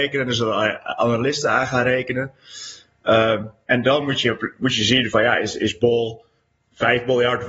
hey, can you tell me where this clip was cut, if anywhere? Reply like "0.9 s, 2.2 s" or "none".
none